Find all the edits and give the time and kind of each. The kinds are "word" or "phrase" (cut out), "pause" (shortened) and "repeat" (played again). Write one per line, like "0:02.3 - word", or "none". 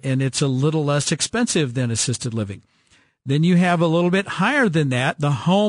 none